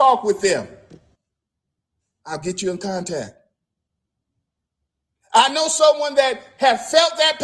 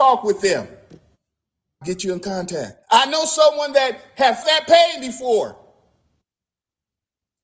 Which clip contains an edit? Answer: second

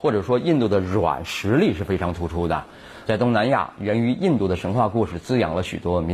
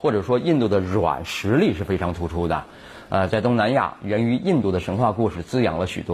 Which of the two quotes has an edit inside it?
first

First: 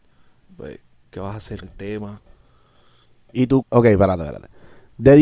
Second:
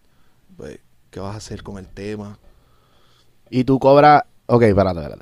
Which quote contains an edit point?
first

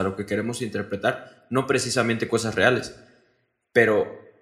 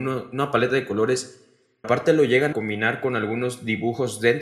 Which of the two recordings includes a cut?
second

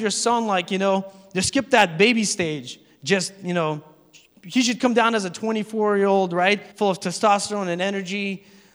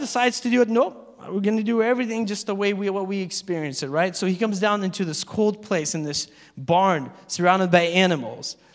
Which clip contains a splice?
first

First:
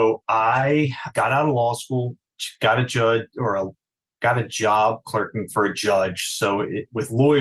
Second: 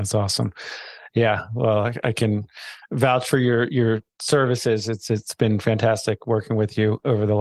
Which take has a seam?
first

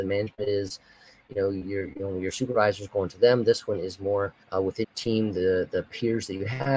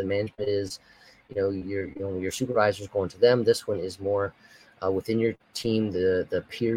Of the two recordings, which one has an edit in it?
first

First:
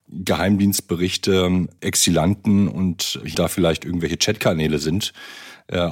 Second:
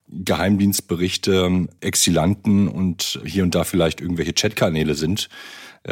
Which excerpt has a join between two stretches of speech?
first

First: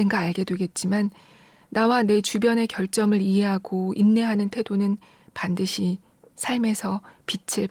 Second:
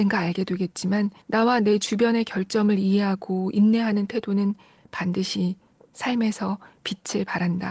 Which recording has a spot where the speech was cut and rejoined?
second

